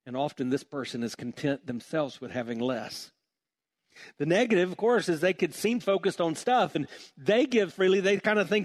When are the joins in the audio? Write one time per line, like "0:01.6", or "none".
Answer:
0:07.7